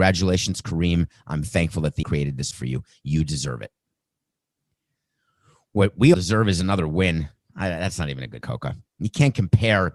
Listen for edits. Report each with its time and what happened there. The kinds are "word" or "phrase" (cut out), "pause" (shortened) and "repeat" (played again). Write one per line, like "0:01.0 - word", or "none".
0:01.4 - word
0:02.0 - word
0:02.5 - word
0:06.1 - word
0:08.4 - word